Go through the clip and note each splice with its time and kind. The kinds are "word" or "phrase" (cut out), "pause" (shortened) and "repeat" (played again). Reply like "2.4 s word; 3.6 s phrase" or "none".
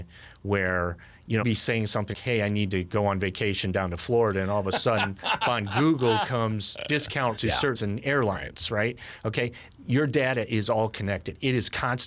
1.4 s word; 2.1 s word; 5.4 s word; 7.4 s word; 7.7 s word

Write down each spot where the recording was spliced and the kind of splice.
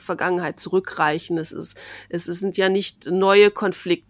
none

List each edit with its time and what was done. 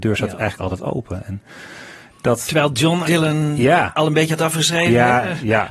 3.0 s word

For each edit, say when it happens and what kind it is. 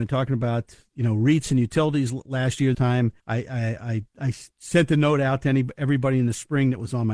2.7 s word; 3.2 s pause; 4.1 s pause; 4.5 s pause

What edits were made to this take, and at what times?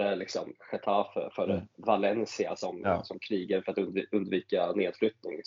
none

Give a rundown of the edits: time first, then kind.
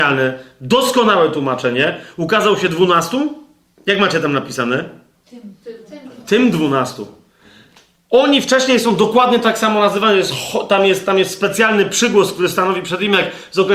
none

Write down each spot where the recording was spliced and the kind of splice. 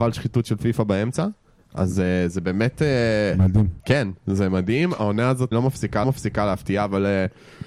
3.8 s pause; 5.5 s word; 6.0 s repeat

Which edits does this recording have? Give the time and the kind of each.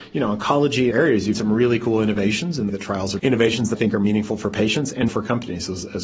0.9 s word; 1.3 s word; 2.7 s word; 3.2 s word; 3.7 s word; 5.1 s word

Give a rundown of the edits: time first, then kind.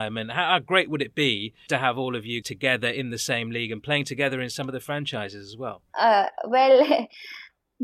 1.7 s word; 2.4 s word

